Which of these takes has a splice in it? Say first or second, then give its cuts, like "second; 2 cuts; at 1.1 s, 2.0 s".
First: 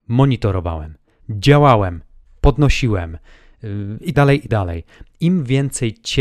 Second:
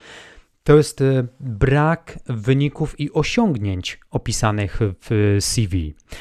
first; 3 cuts; at 1.2 s, 4.1 s, 4.5 s